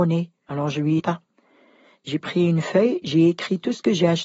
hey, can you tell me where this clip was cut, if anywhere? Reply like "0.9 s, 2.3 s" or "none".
1.0 s